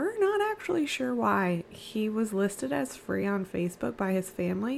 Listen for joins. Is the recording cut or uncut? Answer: uncut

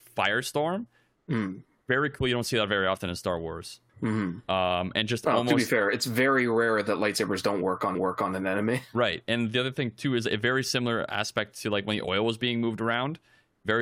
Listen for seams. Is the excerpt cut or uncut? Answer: cut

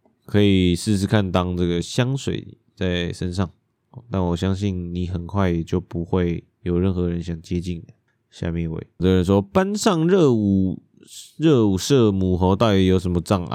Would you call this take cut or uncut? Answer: cut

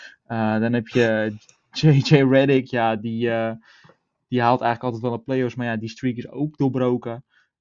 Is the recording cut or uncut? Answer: uncut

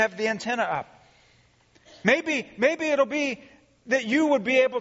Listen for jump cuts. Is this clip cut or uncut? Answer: uncut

